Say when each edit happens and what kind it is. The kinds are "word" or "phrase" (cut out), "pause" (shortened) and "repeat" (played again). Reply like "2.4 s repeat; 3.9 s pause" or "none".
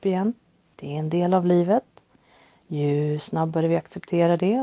none

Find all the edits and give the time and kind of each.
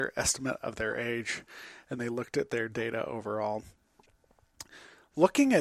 2.0 s word

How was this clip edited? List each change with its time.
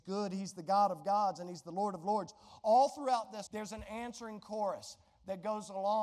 3.5 s word

